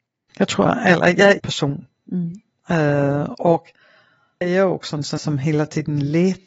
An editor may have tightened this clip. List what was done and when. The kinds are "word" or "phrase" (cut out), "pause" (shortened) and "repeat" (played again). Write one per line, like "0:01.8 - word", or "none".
0:01.4 - phrase
0:04.4 - word
0:05.2 - word